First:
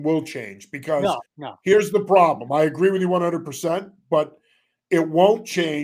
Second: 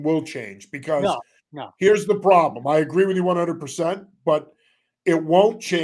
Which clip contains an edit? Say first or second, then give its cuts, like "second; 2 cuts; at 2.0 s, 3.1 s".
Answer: first; 1 cut; at 1.3 s